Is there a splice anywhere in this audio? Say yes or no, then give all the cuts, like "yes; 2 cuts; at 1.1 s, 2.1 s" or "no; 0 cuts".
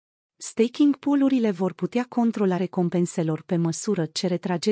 yes; 1 cut; at 2.6 s